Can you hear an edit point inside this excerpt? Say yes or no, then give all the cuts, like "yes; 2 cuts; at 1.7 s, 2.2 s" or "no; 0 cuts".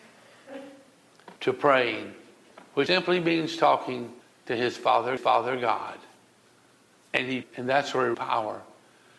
yes; 6 cuts; at 1.4 s, 2.9 s, 4.2 s, 5.2 s, 7.4 s, 8.1 s